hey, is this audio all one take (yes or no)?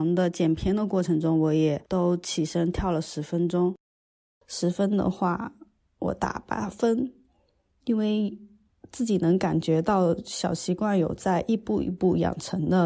yes